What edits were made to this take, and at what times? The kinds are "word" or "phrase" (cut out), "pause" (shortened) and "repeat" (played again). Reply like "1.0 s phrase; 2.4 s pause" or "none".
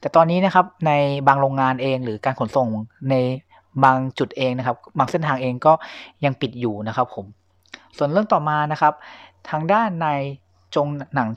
none